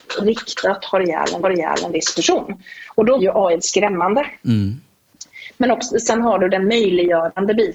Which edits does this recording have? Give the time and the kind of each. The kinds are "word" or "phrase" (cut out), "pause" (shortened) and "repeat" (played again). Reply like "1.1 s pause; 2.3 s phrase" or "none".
1.4 s repeat; 3.2 s word; 3.6 s word